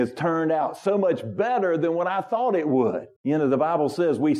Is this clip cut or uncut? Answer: cut